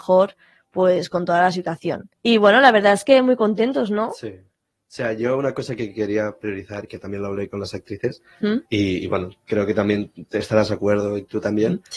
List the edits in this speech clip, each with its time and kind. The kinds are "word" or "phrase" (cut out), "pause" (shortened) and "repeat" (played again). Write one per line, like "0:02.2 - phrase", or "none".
0:02.1 - pause
0:08.6 - pause